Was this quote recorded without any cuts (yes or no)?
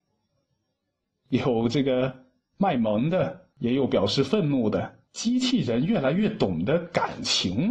no